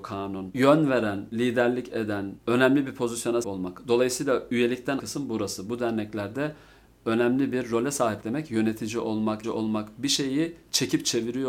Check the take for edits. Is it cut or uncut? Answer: cut